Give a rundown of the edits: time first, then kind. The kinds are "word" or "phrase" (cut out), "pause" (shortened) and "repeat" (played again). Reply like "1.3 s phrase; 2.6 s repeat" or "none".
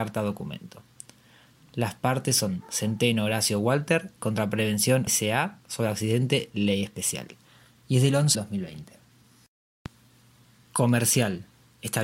5.1 s word; 8.3 s phrase